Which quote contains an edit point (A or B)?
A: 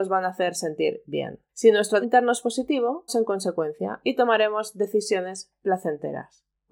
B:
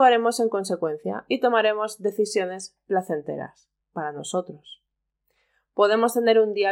A